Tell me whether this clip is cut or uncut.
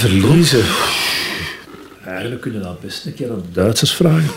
uncut